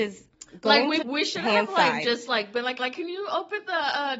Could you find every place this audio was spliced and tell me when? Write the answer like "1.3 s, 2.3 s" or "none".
1.0 s, 2.8 s